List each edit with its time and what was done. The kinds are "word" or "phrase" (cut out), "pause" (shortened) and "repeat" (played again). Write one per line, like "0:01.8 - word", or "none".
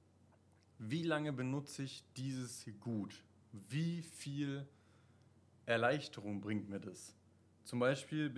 none